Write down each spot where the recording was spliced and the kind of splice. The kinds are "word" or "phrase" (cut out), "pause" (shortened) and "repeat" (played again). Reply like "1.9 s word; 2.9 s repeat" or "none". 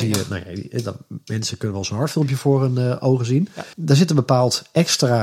3.7 s pause